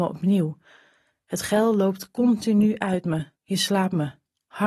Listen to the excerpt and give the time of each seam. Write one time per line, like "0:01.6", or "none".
0:03.4